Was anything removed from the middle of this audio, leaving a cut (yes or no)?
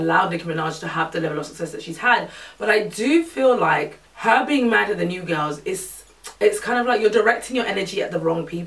yes